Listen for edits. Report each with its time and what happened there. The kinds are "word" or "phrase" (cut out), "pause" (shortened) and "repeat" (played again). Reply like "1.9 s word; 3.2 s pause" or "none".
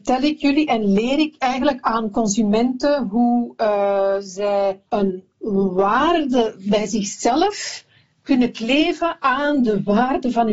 4.9 s pause